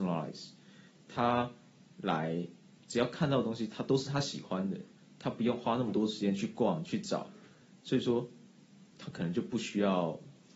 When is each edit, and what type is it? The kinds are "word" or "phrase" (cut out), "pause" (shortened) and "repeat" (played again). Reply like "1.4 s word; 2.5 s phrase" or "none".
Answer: 8.9 s word